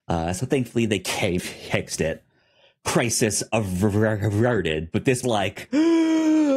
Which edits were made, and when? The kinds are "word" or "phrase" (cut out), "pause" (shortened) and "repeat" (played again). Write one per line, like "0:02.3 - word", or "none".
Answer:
0:01.4 - word
0:05.2 - word